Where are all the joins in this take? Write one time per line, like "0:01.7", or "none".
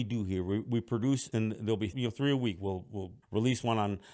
0:01.3
0:01.9
0:03.2